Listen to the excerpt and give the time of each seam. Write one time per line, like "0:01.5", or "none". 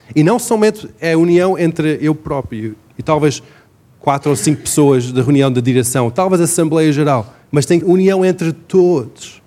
0:07.4
0:07.8